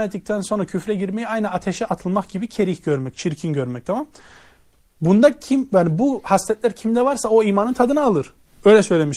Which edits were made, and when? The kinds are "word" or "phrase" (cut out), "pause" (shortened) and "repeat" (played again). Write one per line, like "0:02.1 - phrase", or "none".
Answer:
none